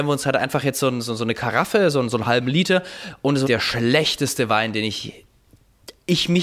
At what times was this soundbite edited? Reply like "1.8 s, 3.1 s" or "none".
3.4 s